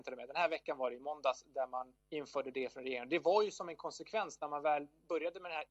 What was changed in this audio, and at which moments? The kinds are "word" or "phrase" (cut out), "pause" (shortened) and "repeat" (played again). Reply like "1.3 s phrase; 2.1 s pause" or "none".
2.0 s pause